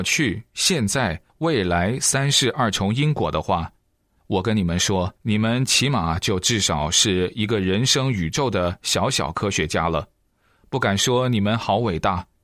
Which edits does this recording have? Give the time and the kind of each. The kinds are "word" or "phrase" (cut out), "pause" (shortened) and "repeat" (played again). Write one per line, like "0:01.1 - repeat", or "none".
0:05.2 - pause